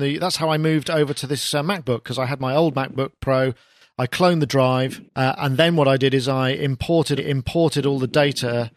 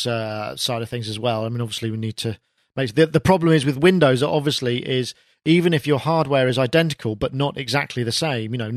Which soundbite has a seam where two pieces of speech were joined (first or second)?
first